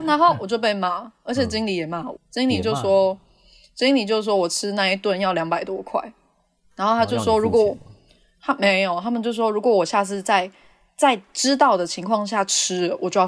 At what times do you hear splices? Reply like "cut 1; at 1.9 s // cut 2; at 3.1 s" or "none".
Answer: cut 1; at 2.2 s